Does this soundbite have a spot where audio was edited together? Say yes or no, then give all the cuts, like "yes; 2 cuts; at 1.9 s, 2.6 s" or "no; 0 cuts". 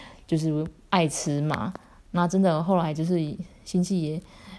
no; 0 cuts